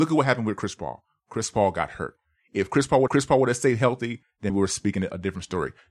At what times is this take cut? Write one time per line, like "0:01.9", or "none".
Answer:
0:03.1
0:04.5

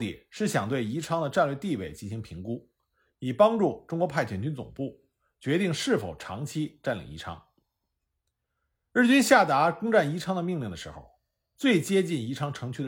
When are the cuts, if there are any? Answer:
none

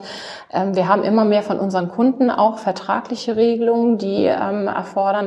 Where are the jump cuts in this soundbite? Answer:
none

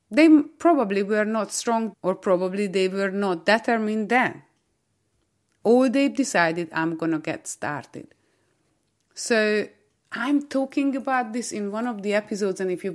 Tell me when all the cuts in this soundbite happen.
0:01.9

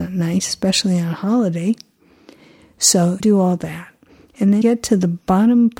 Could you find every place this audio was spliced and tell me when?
0:03.2
0:04.6

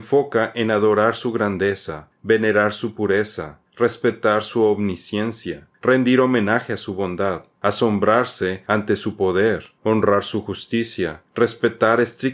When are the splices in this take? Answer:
none

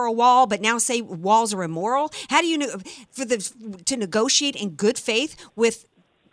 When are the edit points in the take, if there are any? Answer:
none

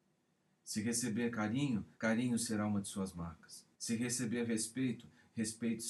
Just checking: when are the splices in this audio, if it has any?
0:01.9
0:03.7

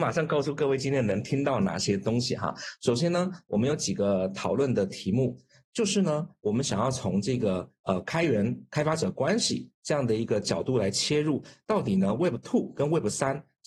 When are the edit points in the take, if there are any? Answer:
none

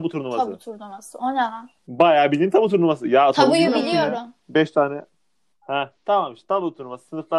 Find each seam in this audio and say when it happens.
0:01.8
0:04.4
0:06.0

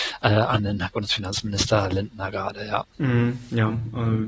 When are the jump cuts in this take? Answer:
0:02.9

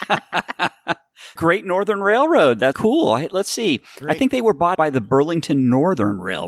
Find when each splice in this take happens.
0:01.4
0:02.7
0:04.7

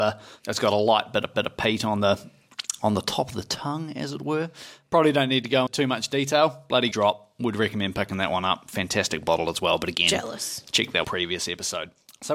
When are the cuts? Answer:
0:01.3
0:05.7
0:06.9
0:11.0

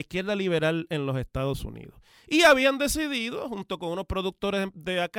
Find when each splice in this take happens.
none

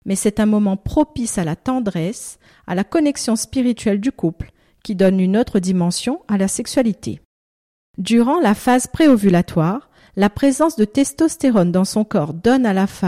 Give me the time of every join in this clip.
none

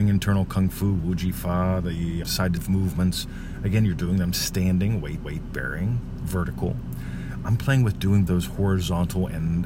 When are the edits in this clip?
0:02.2
0:02.6
0:05.2
0:08.3

